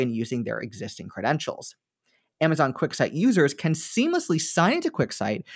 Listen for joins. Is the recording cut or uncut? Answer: uncut